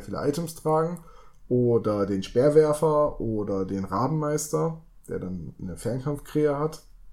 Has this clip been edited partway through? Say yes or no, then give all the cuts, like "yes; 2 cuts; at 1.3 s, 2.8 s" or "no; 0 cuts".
no; 0 cuts